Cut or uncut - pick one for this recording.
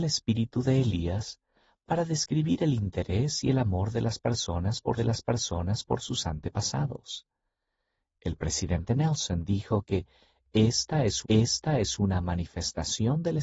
cut